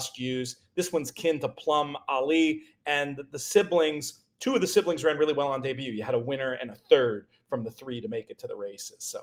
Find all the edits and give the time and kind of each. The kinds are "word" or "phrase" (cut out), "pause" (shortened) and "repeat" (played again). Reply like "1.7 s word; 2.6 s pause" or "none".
none